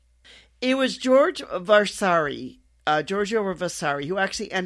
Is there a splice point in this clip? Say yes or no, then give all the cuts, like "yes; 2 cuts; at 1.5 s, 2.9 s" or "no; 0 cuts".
no; 0 cuts